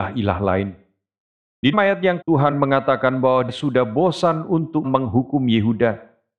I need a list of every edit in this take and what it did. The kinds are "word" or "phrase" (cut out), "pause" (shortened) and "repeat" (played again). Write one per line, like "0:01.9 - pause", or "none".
0:01.7 - word
0:02.2 - word
0:02.5 - word
0:03.5 - word
0:04.8 - word